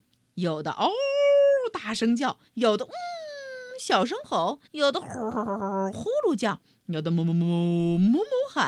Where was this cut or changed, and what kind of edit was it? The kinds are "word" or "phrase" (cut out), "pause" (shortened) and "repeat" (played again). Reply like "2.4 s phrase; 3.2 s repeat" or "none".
2.5 s pause; 4.7 s pause